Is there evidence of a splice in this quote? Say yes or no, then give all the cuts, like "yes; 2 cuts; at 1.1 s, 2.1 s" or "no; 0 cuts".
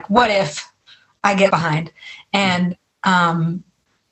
yes; 1 cut; at 1.5 s